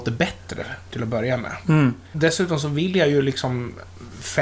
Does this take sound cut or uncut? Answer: uncut